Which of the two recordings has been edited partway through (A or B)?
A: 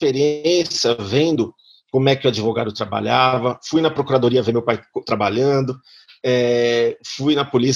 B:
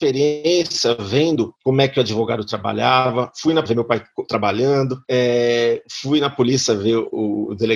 B